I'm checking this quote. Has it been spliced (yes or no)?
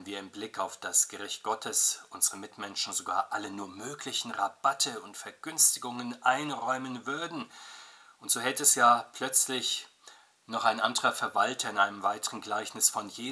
no